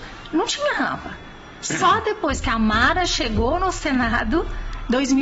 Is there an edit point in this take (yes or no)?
no